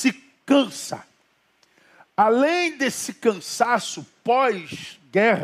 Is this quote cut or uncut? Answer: uncut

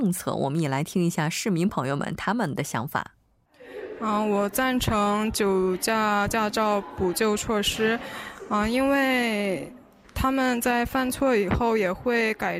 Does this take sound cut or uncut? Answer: uncut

